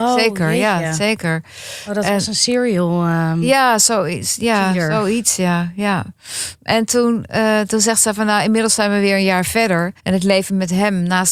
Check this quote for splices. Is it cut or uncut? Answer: cut